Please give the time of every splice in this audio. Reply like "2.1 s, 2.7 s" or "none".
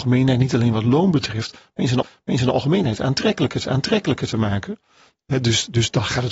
2.0 s, 3.6 s